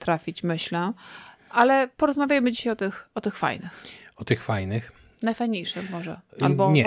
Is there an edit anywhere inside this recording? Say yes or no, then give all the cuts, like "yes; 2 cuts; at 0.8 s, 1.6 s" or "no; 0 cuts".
no; 0 cuts